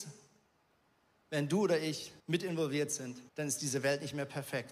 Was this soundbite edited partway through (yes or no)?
yes